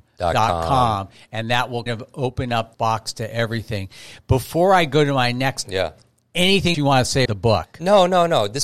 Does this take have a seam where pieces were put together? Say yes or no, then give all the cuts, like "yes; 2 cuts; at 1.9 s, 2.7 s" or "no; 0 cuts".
yes; 5 cuts; at 1.9 s, 2.7 s, 5.7 s, 6.7 s, 7.3 s